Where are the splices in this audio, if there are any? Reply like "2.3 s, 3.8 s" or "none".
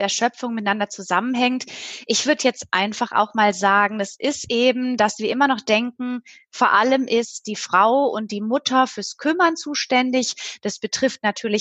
none